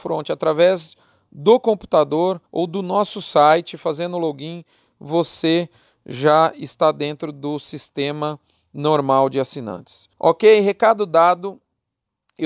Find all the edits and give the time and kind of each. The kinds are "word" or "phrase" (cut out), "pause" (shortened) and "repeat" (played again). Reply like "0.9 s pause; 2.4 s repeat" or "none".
2.5 s pause; 10.1 s pause